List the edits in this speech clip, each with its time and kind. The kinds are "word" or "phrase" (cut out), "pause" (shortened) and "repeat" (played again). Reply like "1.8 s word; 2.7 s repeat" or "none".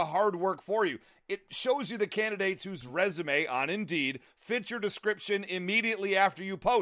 none